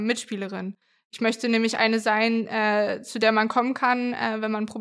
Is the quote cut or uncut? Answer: uncut